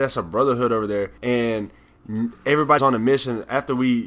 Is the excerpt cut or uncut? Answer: cut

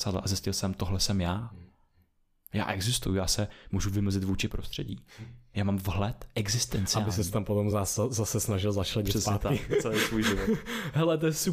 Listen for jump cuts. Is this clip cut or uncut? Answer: uncut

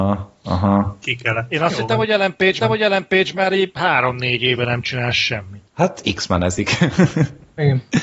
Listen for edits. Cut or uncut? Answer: cut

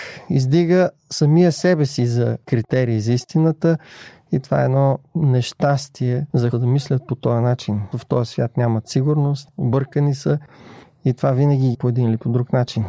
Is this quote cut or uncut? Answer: cut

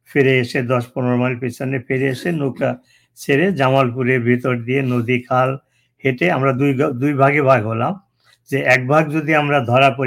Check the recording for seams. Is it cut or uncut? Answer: uncut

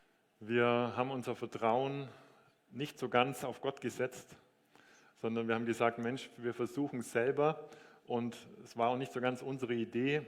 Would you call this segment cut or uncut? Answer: uncut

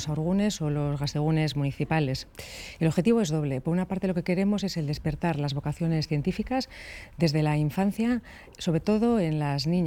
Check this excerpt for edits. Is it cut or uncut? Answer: uncut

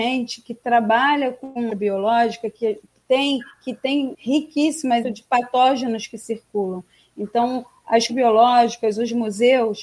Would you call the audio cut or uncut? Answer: cut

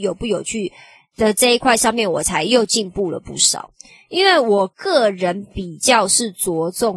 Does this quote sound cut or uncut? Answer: uncut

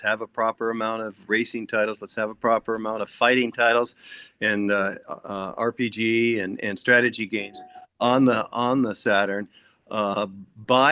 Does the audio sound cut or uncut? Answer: uncut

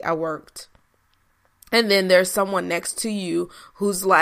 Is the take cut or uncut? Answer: uncut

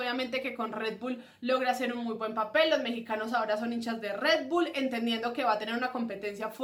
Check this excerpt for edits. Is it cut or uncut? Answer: uncut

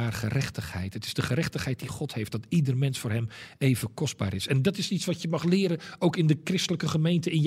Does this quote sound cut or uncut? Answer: uncut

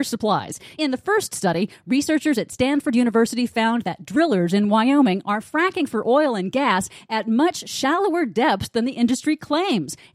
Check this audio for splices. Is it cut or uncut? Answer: uncut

